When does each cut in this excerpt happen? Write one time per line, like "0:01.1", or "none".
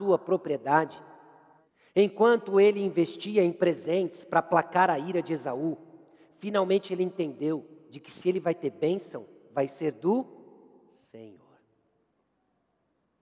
none